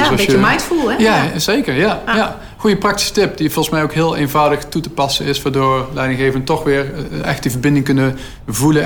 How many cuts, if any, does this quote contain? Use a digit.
0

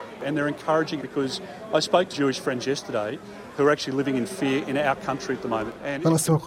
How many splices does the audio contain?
2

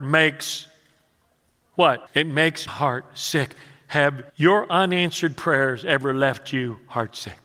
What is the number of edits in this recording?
3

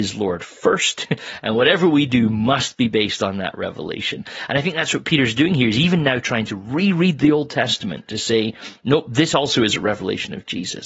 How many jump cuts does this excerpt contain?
0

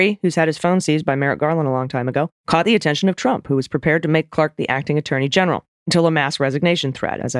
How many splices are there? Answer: 2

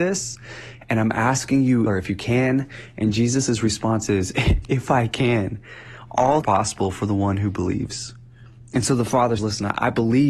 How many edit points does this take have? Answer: 3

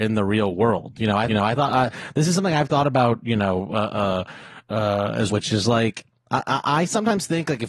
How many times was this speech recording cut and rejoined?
2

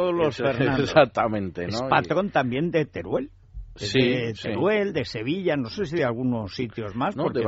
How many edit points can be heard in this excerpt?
0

